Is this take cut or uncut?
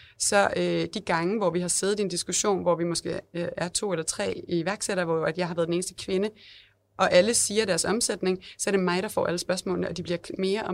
uncut